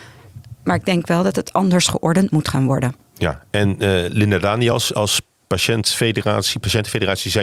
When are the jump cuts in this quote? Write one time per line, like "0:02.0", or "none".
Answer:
none